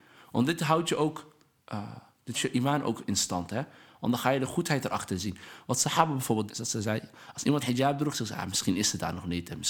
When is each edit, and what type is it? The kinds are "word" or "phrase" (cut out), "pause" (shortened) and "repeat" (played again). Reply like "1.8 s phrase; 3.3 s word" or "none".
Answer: 2.3 s word; 6.5 s word; 7.6 s word

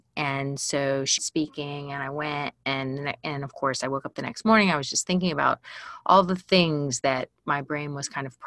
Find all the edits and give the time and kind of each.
1.2 s phrase

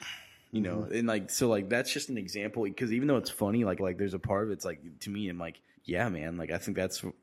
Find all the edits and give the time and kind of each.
3.8 s phrase; 5.0 s word; 5.7 s pause

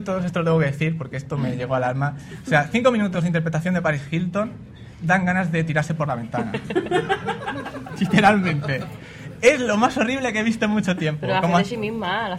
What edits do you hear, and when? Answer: none

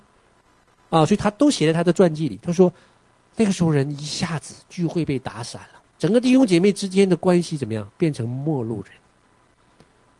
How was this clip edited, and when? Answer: 5.9 s pause; 7.9 s pause

